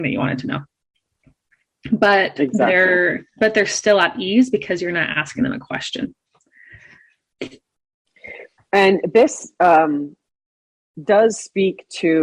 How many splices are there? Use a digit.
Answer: 0